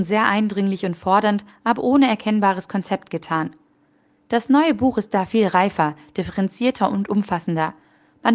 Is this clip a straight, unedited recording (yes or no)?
yes